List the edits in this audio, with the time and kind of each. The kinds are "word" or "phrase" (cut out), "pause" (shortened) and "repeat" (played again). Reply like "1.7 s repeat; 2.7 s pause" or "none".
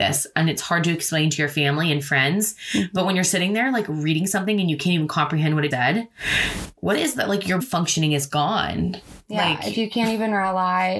5.7 s word; 7.6 s word

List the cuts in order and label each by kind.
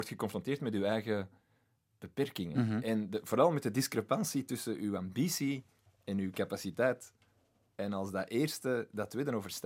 none

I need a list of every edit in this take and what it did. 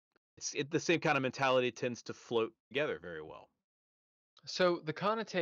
2.6 s pause

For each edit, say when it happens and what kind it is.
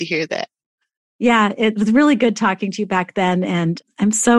none

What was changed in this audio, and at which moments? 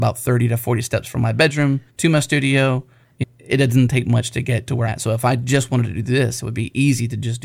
1.9 s pause; 3.2 s word; 4.9 s word

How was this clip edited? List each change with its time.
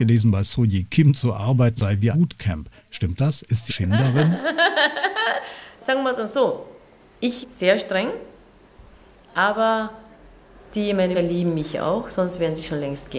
1.8 s word; 2.1 s word; 3.7 s word; 5.8 s word; 7.4 s word; 11.1 s word

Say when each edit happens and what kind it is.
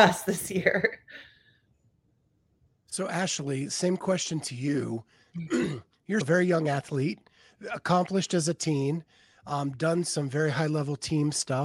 6.2 s word

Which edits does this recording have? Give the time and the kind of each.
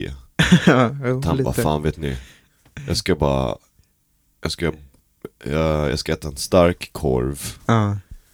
none

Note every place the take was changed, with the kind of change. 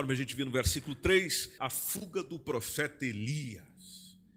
1.6 s word

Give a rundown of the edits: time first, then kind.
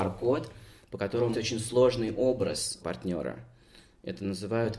1.3 s phrase; 2.8 s word

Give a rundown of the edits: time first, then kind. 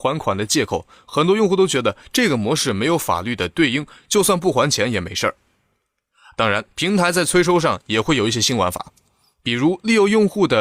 6.7 s pause

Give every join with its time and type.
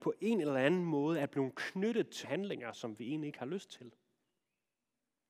2.2 s word

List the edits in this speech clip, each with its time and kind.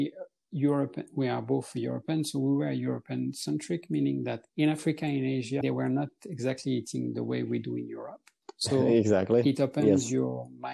4.5 s pause; 5.6 s word

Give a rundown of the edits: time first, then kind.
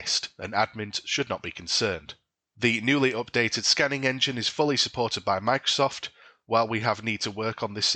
none

